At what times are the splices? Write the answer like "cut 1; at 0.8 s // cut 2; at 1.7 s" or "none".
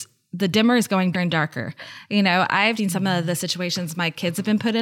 cut 1; at 1.1 s // cut 2; at 2.8 s